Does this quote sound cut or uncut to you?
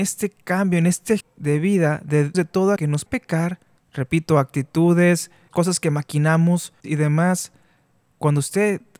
cut